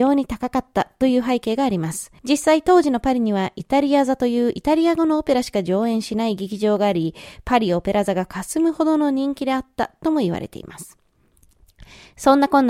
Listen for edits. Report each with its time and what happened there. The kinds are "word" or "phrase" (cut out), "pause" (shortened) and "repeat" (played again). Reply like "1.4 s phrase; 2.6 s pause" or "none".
2.2 s pause